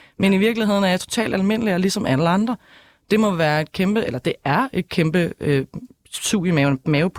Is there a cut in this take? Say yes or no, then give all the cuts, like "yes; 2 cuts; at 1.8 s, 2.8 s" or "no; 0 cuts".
no; 0 cuts